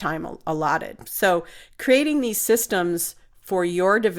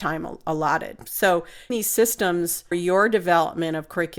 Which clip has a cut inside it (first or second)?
second